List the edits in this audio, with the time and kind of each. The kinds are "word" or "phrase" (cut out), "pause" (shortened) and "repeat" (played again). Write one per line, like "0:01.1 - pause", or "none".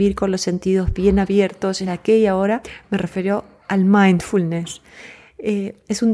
0:01.8 - word
0:02.6 - word